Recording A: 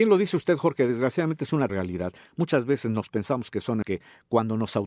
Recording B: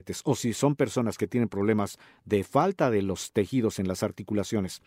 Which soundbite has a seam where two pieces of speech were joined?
A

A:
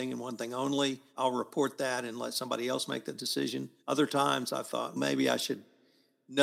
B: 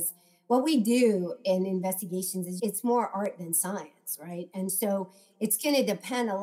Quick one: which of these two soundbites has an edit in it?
A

